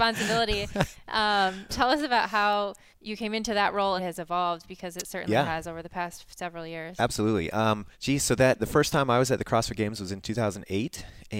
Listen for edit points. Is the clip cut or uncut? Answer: cut